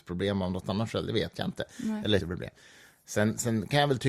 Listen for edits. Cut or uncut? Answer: cut